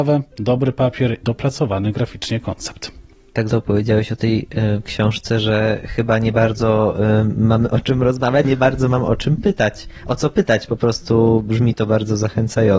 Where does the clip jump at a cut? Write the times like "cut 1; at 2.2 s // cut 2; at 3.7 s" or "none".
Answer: cut 1; at 1.2 s // cut 2; at 3.5 s // cut 3; at 8.4 s